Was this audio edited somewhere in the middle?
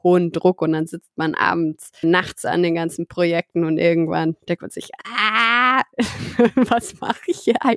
yes; 1 cut; at 2.0 s

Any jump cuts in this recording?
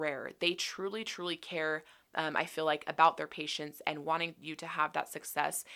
no; 0 cuts

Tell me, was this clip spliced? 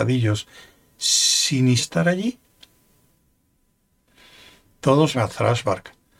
yes; 2 cuts; at 1.8 s, 5.1 s

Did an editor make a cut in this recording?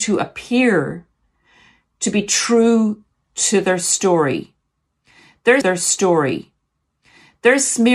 yes; 1 cut; at 5.6 s

